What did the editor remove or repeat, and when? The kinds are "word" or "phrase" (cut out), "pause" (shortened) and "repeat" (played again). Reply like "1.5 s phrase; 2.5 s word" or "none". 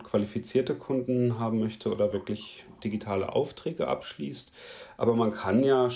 none